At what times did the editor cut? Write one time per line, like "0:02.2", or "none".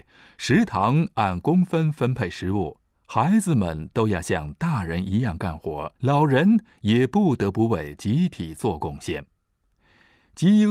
0:06.0